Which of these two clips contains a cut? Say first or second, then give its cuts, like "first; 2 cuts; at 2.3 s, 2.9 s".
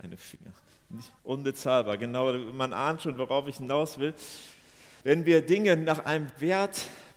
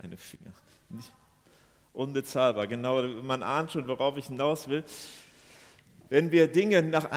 first; 2 cuts; at 1.2 s, 5.0 s